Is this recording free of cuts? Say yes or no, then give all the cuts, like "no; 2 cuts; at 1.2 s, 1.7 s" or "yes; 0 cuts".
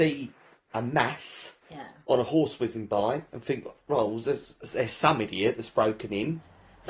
no; 2 cuts; at 1.6 s, 3.3 s